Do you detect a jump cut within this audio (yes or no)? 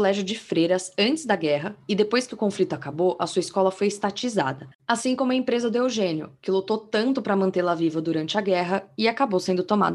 no